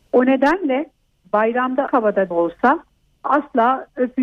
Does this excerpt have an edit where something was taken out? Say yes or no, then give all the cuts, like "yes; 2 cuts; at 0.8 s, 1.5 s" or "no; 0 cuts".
yes; 2 cuts; at 1.9 s, 2.3 s